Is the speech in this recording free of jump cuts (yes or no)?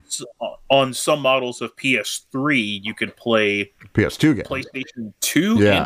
yes